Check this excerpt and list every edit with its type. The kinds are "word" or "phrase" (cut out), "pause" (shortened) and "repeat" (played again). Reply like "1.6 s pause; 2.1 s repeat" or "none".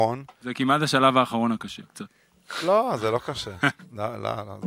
1.9 s word